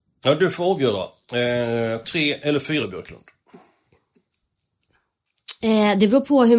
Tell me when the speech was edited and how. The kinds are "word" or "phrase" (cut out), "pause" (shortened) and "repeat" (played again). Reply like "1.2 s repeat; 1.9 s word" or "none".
2.0 s word; 2.8 s word